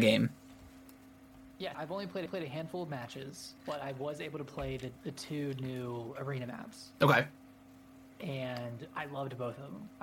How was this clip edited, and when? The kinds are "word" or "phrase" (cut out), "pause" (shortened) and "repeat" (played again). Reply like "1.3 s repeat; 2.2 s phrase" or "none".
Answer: 1.7 s word; 2.3 s repeat; 3.6 s pause; 5.0 s pause

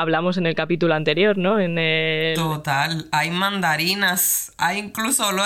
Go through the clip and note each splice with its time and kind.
none

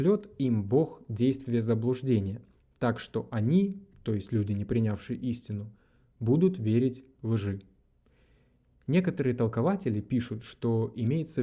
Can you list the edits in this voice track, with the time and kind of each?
none

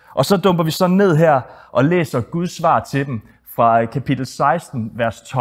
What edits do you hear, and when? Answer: none

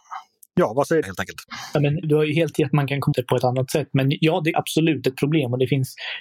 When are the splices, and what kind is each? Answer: 1.0 s phrase; 2.0 s word; 2.5 s word; 3.1 s word; 4.5 s phrase

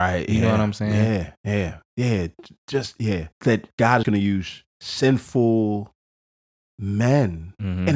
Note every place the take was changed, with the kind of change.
1.4 s pause; 3.3 s pause; 4.0 s phrase; 4.7 s pause

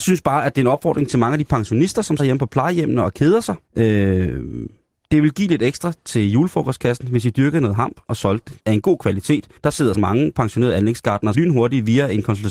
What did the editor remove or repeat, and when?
2.2 s word; 3.7 s pause; 8.6 s pause; 9.6 s pause; 9.9 s word; 11.3 s word

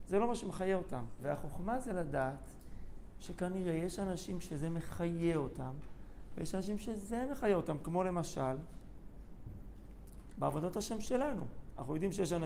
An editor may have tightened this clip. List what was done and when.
none

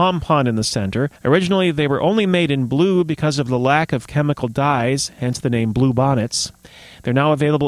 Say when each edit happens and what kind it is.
1.2 s pause

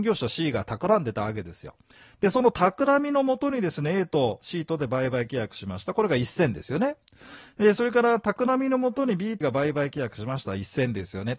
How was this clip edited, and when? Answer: 9.4 s word

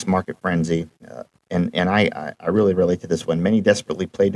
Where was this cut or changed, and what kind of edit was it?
0.9 s pause

